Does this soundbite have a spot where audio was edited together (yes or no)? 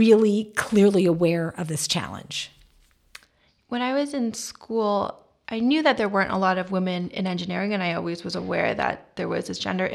no